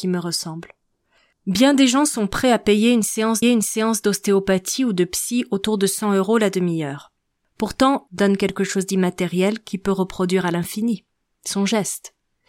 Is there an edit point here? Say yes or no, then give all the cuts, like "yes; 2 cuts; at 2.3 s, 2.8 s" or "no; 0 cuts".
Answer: yes; 2 cuts; at 3.4 s, 8.1 s